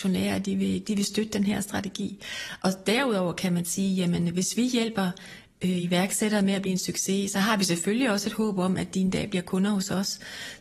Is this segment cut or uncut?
uncut